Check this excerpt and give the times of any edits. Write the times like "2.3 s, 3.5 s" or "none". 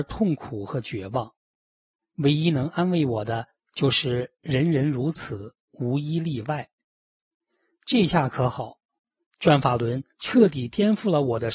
none